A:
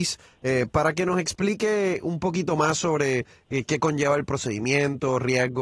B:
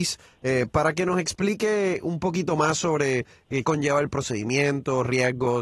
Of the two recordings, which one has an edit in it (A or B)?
B